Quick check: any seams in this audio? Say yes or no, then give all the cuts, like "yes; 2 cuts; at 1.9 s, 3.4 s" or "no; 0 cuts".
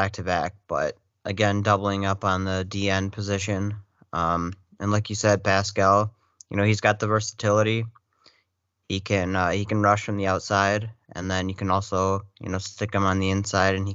no; 0 cuts